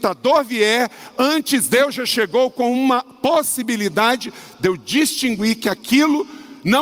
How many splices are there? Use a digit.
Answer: 0